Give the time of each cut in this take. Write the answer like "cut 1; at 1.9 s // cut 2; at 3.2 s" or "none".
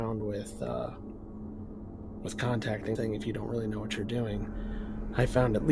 cut 1; at 2.2 s // cut 2; at 2.9 s